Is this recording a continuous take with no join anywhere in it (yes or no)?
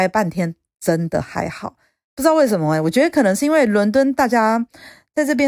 yes